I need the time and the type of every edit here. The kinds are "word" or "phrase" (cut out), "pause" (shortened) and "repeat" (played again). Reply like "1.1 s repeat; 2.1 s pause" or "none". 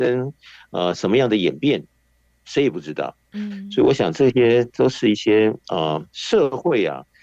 6.1 s pause

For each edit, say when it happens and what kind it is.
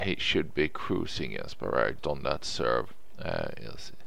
2.0 s word

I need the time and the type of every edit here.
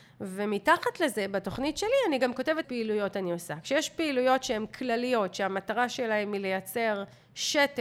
2.6 s word

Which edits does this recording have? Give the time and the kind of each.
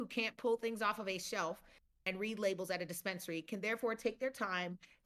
none

